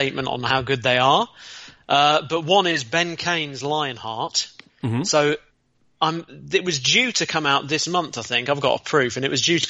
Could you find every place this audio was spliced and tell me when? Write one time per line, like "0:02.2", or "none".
none